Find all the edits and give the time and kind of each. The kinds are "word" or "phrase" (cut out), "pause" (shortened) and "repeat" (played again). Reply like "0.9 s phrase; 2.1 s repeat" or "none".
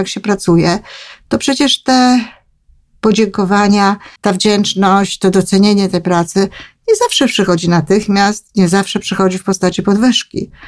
4.2 s pause